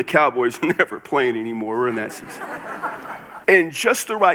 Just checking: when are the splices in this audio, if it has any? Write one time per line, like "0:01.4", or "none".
0:03.4